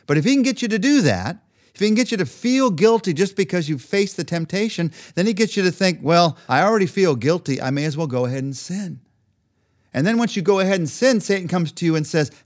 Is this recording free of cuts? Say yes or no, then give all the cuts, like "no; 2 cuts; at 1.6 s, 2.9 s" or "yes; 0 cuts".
yes; 0 cuts